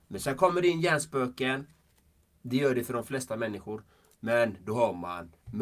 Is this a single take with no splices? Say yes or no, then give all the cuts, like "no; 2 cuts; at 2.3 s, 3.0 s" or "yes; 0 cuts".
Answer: yes; 0 cuts